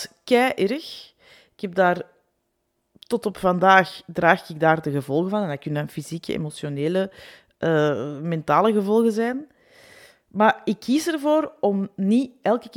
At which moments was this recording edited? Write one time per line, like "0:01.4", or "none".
none